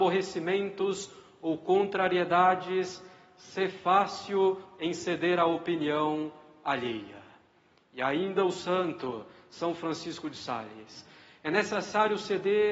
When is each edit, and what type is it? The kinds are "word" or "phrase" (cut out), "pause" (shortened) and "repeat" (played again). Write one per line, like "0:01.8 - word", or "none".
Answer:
none